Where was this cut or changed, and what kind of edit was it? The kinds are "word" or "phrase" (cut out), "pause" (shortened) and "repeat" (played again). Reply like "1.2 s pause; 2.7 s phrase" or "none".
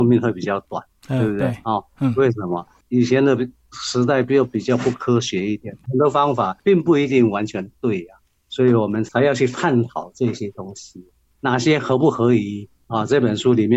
5.8 s word